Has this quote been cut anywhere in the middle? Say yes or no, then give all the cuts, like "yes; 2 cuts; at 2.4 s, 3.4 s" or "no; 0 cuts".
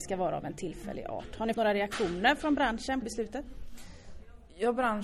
yes; 2 cuts; at 1.5 s, 3.0 s